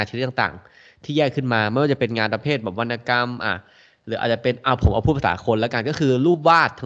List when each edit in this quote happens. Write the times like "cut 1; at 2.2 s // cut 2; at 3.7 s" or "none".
none

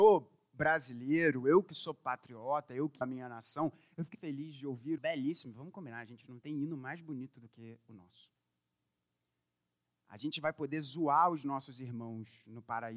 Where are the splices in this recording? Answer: cut 1; at 3.0 s // cut 2; at 4.1 s // cut 3; at 5.0 s

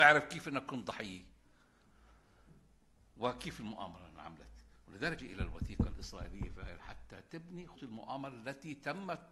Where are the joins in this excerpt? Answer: cut 1; at 5.2 s // cut 2; at 6.8 s // cut 3; at 7.8 s

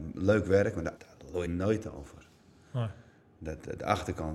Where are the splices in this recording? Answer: cut 1; at 1.0 s // cut 2; at 1.4 s

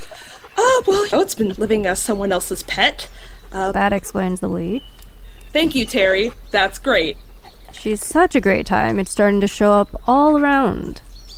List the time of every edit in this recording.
cut 1; at 1.1 s // cut 2; at 1.6 s // cut 3; at 8.0 s

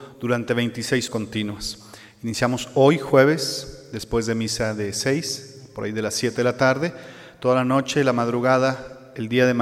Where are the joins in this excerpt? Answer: cut 1; at 1.1 s

